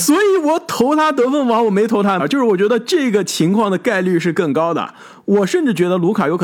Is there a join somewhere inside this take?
yes; 1 cut; at 2.2 s

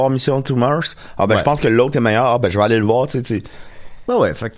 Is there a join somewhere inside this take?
no; 0 cuts

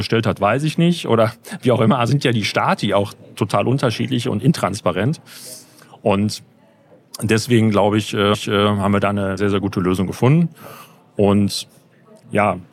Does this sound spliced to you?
yes; 3 cuts; at 2.1 s, 8.3 s, 9.4 s

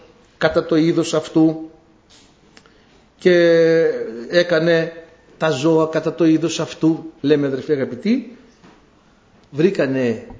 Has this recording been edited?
yes; 1 cut; at 7.2 s

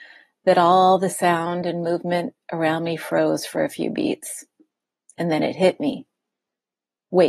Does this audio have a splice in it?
no; 0 cuts

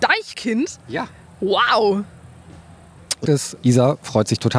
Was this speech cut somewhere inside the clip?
yes; 2 cuts; at 3.2 s, 3.6 s

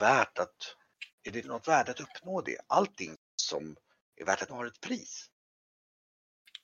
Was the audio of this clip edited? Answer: yes; 4 cuts; at 1.1 s, 1.4 s, 3.2 s, 4.5 s

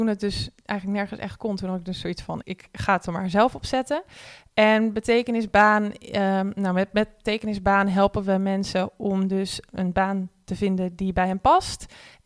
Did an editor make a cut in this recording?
yes; 1 cut; at 2.4 s

